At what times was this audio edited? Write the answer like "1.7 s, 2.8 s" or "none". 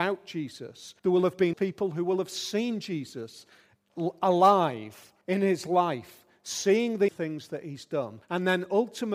1.0 s, 1.5 s, 5.2 s, 7.1 s, 8.2 s